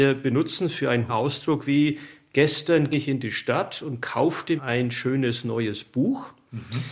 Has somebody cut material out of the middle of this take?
yes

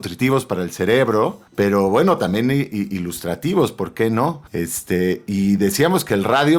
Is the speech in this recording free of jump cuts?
no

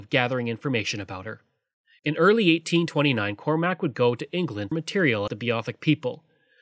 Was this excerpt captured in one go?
no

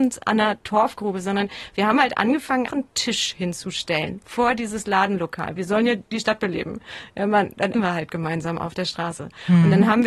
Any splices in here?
yes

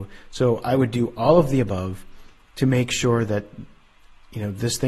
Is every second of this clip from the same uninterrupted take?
yes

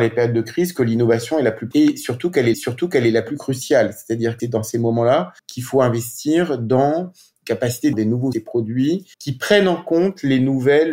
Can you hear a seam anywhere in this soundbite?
yes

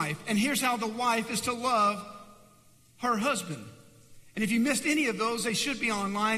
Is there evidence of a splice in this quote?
no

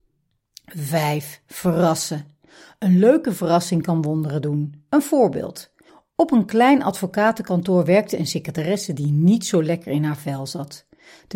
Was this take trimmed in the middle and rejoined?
no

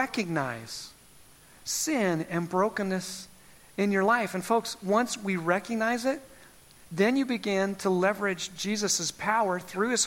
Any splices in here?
no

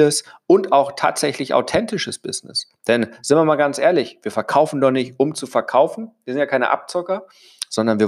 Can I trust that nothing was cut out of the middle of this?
yes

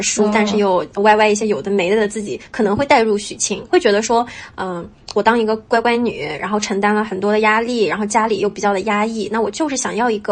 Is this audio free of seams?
yes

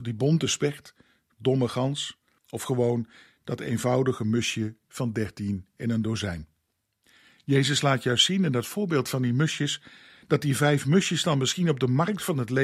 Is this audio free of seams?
no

